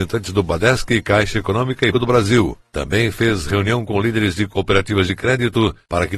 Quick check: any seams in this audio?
yes; 1 cut; at 1.9 s

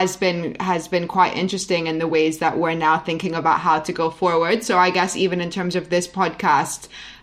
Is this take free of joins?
yes; 0 cuts

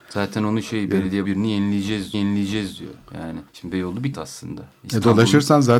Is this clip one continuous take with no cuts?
no; 4 cuts; at 1.2 s, 2.1 s, 3.5 s, 4.1 s

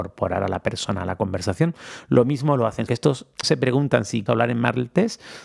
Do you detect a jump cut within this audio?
yes; 3 cuts; at 2.9 s, 3.4 s, 4.3 s

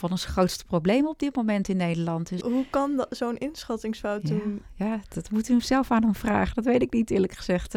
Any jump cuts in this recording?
yes; 1 cut; at 2.4 s

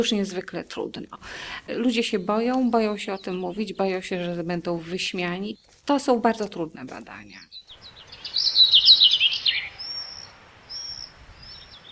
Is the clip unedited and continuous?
yes; 0 cuts

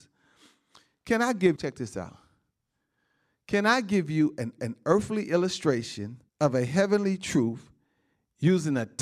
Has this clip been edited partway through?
yes; 3 cuts; at 1.6 s, 4.6 s, 6.3 s

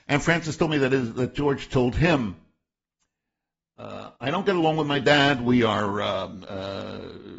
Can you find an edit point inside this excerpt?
yes; 1 cut; at 4.1 s

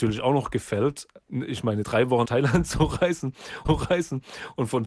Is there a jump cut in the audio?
yes; 4 cuts; at 1.3 s, 1.8 s, 2.2 s, 3.6 s

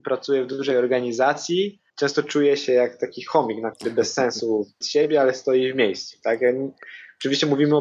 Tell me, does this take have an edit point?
yes; 3 cuts; at 1.9 s, 3.7 s, 4.8 s

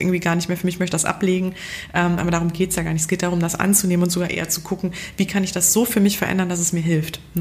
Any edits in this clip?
no; 0 cuts

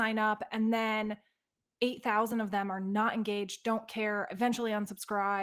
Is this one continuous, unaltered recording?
yes; 0 cuts

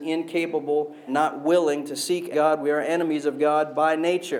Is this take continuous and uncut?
no; 2 cuts; at 1.1 s, 2.3 s

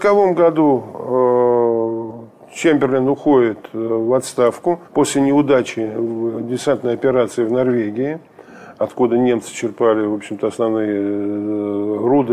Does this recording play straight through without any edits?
no; 1 cut; at 4.8 s

